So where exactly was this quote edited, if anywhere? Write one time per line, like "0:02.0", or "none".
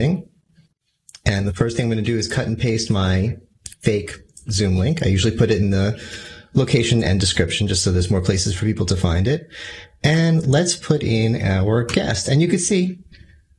none